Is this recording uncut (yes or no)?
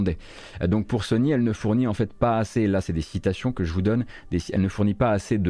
yes